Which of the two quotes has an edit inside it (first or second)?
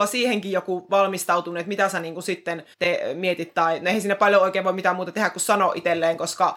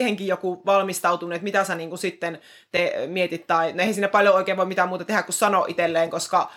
first